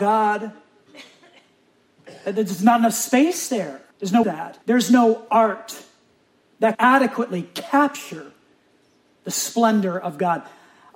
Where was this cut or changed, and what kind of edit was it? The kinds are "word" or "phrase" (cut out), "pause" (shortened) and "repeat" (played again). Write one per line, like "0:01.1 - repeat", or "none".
0:03.9 - pause
0:04.2 - phrase
0:04.6 - pause
0:06.7 - word